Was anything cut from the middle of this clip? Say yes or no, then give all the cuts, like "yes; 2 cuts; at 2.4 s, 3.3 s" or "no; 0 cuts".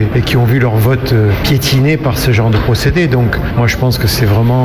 no; 0 cuts